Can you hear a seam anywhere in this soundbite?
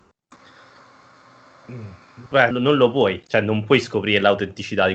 yes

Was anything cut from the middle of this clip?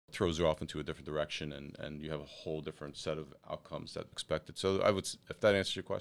yes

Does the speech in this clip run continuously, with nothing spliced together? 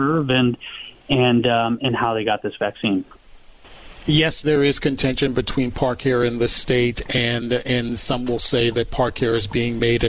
yes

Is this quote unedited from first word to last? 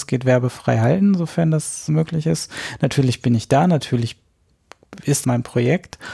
no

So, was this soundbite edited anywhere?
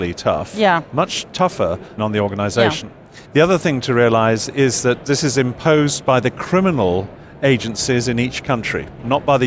yes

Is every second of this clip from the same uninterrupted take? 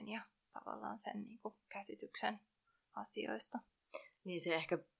yes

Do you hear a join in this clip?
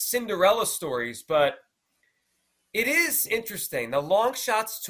no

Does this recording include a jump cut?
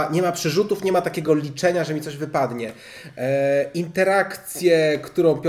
no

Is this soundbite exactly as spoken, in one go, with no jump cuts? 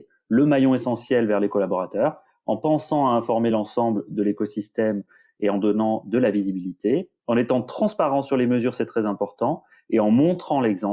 yes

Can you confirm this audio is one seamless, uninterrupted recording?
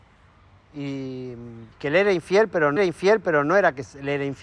no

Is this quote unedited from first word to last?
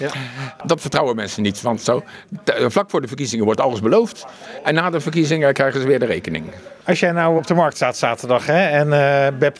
no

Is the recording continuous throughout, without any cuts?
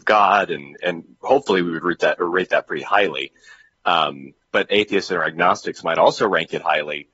yes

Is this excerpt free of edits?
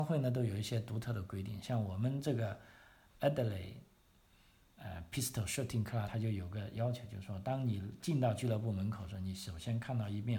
no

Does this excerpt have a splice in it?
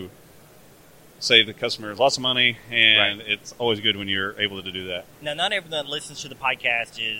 no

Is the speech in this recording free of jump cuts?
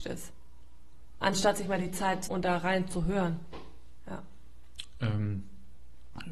no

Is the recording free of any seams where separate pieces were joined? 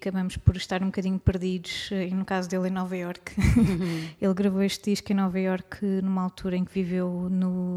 yes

